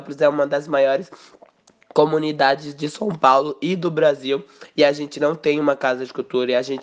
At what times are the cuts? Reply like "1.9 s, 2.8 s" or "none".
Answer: none